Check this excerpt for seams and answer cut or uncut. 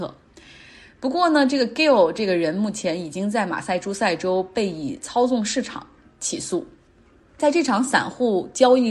cut